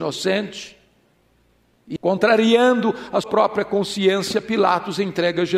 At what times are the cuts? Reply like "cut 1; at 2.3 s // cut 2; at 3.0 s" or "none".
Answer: cut 1; at 2.0 s // cut 2; at 3.2 s